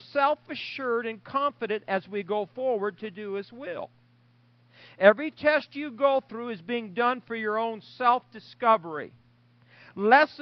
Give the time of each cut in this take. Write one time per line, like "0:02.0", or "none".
none